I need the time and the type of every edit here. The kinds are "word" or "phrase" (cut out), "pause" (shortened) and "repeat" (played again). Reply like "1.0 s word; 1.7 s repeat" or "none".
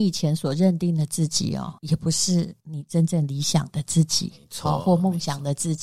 1.8 s pause; 2.6 s pause